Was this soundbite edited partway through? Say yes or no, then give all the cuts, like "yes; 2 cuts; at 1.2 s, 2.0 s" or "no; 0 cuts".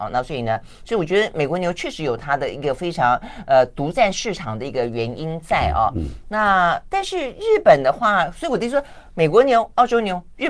no; 0 cuts